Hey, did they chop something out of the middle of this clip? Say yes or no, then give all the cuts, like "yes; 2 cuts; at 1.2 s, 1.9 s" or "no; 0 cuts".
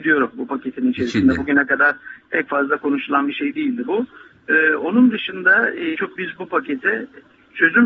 yes; 1 cut; at 6.0 s